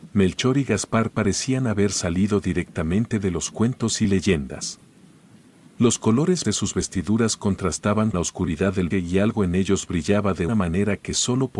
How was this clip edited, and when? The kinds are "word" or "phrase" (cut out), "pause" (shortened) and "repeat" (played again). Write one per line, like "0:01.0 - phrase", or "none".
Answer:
0:06.4 - word
0:08.1 - word
0:08.9 - word
0:10.5 - word